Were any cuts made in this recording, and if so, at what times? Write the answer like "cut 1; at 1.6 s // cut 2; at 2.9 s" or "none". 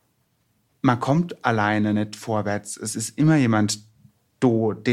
none

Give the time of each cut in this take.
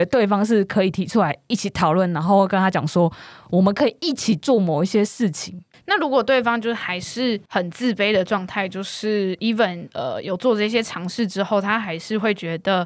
none

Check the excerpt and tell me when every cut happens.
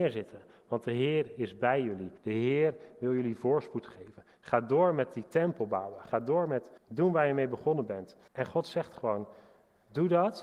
cut 1; at 2.2 s // cut 2; at 6.8 s // cut 3; at 8.3 s

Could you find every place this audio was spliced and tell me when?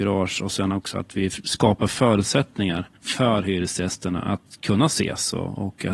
cut 1; at 3.0 s

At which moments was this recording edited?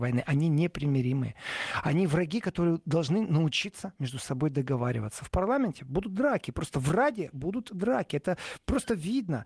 none

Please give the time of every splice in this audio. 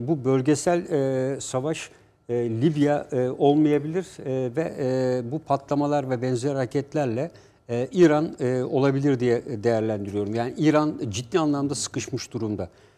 none

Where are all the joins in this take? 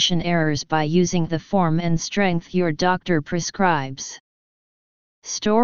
cut 1; at 1.3 s

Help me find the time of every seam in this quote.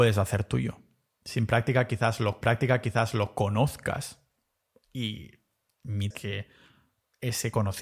cut 1; at 2.4 s // cut 2; at 6.1 s

